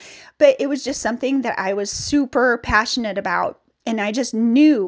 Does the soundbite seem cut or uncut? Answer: uncut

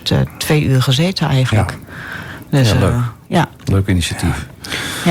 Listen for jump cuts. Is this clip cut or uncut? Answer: uncut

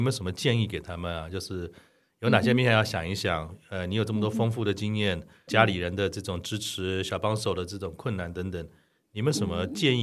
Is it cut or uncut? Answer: cut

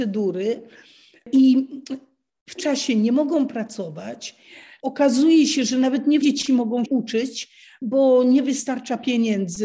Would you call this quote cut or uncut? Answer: cut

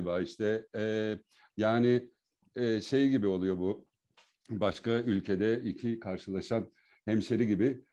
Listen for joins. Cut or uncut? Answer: uncut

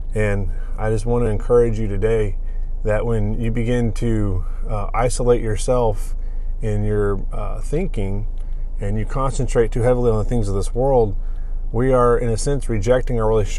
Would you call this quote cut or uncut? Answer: uncut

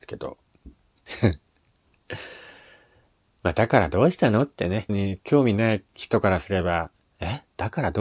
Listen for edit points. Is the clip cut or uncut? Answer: cut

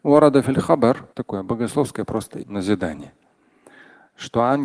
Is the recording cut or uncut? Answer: cut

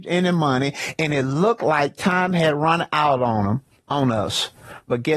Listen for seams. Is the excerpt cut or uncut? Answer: uncut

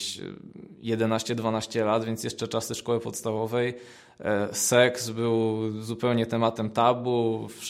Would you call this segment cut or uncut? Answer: uncut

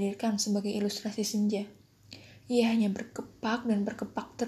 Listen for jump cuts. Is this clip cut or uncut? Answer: uncut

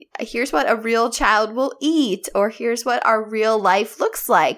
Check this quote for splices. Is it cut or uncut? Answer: uncut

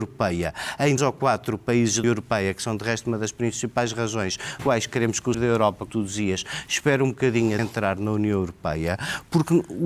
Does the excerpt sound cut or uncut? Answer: cut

